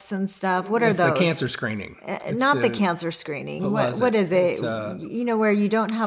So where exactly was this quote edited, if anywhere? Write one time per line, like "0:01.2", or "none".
none